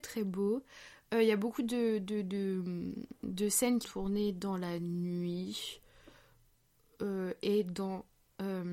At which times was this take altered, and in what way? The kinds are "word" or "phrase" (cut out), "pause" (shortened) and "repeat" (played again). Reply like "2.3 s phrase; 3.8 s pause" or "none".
3.8 s word